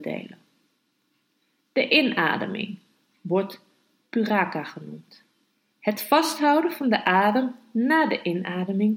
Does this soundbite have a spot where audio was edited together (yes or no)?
no